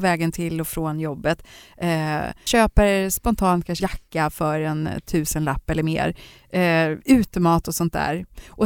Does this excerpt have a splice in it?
yes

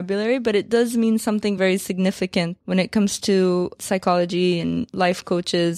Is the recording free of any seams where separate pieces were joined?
yes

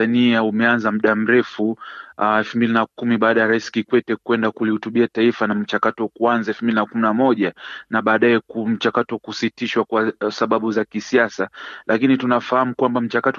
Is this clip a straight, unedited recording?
yes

